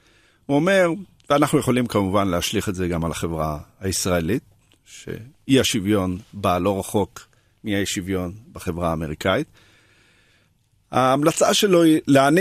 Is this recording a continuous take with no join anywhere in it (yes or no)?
yes